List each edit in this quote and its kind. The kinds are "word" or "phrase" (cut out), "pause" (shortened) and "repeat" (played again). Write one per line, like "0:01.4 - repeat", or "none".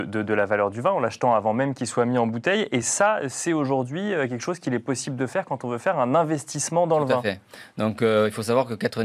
none